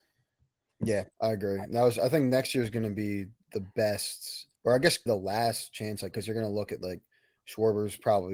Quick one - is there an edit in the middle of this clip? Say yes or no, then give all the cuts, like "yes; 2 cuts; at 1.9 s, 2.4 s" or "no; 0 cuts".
yes; 3 cuts; at 4.6 s, 5.1 s, 6.1 s